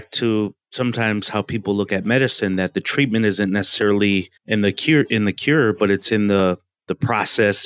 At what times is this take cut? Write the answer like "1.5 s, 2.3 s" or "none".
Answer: 4.4 s

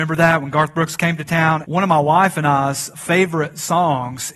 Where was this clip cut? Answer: 1.6 s, 2.9 s

